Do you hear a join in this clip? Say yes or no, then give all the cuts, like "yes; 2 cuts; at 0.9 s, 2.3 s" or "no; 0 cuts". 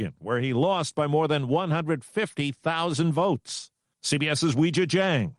no; 0 cuts